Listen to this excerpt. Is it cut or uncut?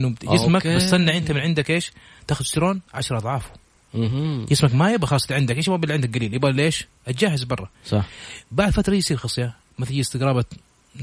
cut